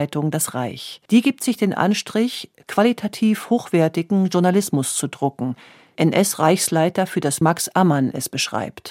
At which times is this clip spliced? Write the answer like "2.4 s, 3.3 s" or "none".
1.1 s, 6.0 s, 7.4 s